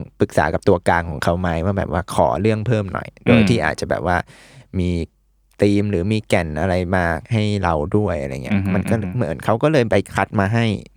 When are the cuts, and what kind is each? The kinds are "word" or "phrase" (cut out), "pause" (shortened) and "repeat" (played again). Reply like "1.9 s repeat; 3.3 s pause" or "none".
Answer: none